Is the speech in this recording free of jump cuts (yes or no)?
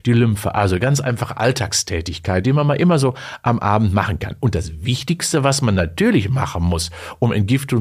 yes